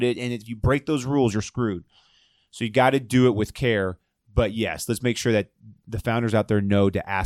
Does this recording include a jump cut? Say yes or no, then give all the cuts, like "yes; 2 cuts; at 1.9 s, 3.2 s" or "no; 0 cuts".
no; 0 cuts